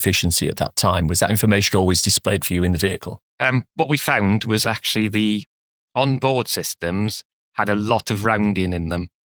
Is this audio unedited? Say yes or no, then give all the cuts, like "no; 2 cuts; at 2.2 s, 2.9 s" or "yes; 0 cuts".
yes; 0 cuts